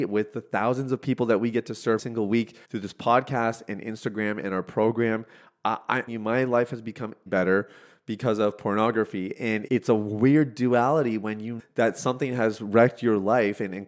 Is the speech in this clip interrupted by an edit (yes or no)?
yes